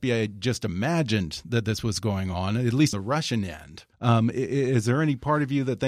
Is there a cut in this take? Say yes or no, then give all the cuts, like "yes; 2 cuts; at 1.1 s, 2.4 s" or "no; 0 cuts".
yes; 2 cuts; at 2.9 s, 3.9 s